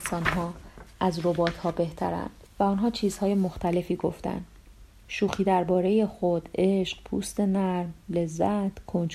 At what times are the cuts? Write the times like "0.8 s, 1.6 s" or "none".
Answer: 2.5 s